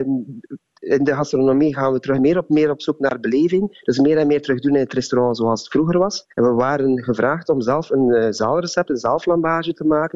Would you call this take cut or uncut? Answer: cut